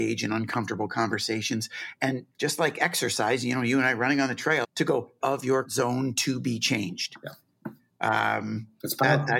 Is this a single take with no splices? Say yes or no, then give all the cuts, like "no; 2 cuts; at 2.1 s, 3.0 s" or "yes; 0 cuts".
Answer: no; 4 cuts; at 2.3 s, 4.6 s, 5.2 s, 5.6 s